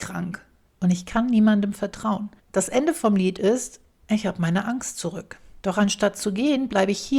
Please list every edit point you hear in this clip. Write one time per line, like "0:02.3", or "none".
0:02.4
0:05.6